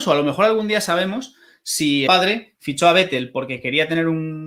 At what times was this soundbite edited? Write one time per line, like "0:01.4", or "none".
0:02.1